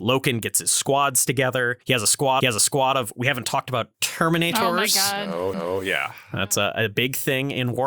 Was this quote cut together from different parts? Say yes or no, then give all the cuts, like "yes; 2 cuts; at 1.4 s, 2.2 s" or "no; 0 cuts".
yes; 3 cuts; at 1.8 s, 2.4 s, 5.5 s